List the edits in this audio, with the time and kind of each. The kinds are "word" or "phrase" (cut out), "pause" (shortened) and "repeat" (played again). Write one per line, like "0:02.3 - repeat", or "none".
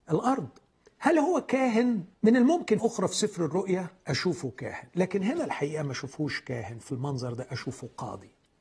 0:02.1 - pause
0:02.8 - phrase